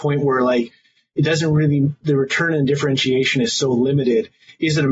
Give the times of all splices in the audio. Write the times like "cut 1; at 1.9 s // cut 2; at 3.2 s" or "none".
none